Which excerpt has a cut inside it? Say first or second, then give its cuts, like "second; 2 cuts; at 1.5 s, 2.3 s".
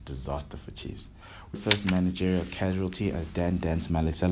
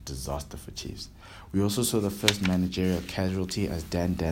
first; 1 cut; at 1.5 s